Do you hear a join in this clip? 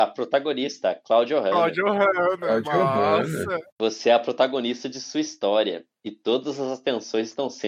yes; 1 cut; at 3.7 s

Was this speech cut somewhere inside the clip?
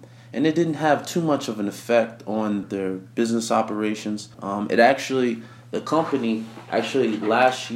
yes; 2 cuts; at 2.6 s, 4.3 s

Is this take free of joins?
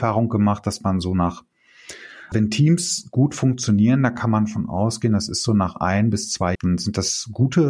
no; 2 cuts; at 2.3 s, 6.5 s

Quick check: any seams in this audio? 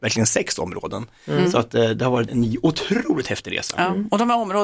yes; 1 cut; at 2.3 s

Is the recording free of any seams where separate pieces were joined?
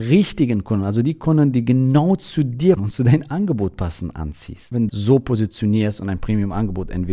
no; 2 cuts; at 2.8 s, 4.9 s

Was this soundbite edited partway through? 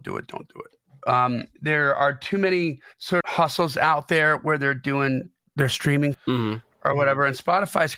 yes; 2 cuts; at 3.2 s, 6.1 s

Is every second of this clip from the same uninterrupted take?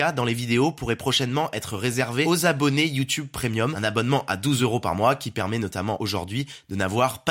yes; 0 cuts

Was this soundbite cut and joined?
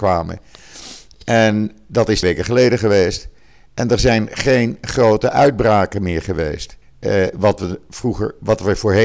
yes; 2 cuts; at 2.2 s, 6.8 s

